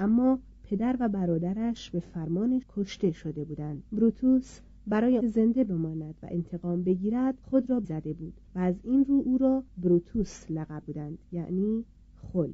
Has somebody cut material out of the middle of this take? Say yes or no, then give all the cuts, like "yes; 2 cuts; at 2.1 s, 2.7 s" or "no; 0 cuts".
yes; 8 cuts; at 2.6 s, 3.9 s, 5.2 s, 7.4 s, 7.8 s, 8.5 s, 9.7 s, 10.8 s